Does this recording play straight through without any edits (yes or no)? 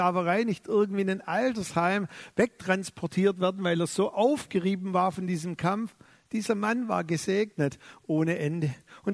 yes